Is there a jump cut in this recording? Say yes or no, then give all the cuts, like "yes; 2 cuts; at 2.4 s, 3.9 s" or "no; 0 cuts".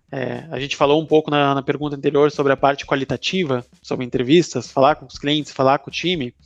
no; 0 cuts